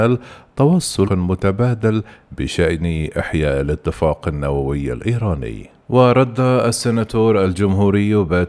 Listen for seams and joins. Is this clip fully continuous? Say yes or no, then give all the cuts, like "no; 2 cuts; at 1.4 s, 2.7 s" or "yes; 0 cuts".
no; 2 cuts; at 1.1 s, 5.8 s